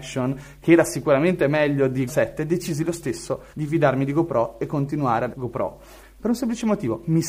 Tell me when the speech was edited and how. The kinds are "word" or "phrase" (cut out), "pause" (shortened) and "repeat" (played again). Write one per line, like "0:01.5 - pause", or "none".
0:02.1 - word
0:03.5 - pause
0:05.3 - word